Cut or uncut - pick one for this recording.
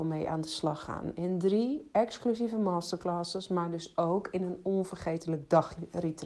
uncut